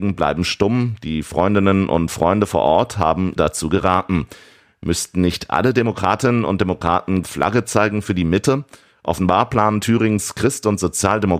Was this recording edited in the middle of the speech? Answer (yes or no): yes